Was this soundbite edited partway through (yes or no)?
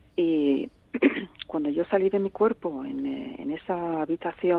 no